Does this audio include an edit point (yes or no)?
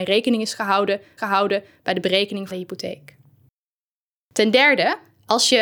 yes